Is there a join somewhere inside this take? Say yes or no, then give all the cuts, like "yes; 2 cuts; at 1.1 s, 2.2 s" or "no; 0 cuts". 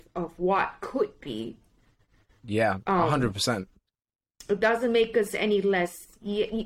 no; 0 cuts